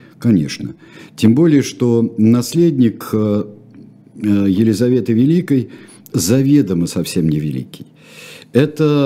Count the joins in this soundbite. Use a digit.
1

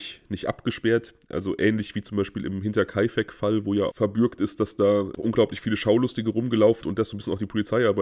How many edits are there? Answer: 3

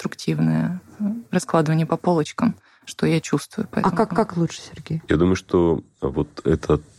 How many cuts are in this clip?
1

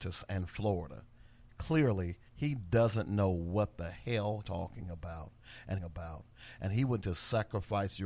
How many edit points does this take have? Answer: 4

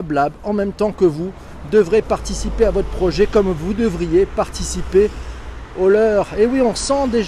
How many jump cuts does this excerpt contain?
0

